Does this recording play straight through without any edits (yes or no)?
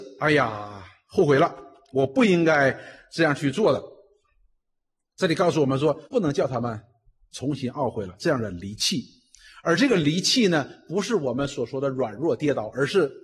no